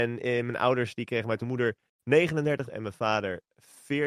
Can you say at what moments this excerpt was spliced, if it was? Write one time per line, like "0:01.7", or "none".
0:01.4
0:02.7